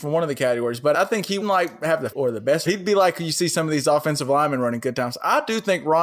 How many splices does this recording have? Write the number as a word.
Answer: four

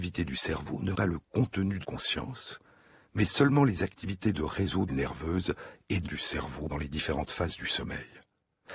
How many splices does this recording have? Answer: five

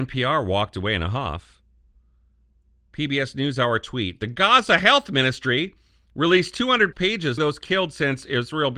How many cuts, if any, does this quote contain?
two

